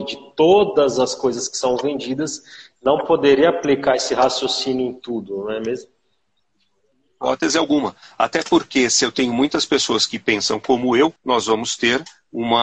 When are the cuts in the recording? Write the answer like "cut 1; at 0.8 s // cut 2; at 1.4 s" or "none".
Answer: cut 1; at 11.2 s